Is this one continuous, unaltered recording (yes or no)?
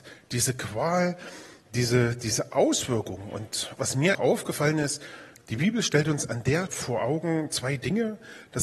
no